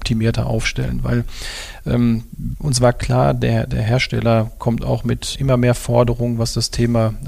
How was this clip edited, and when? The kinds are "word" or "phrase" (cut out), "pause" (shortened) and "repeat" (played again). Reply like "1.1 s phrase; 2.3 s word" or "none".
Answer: 5.3 s word